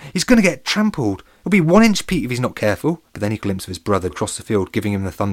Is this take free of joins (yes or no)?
no